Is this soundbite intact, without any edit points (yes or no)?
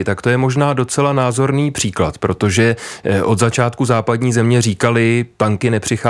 yes